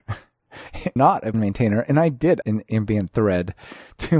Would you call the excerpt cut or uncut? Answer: cut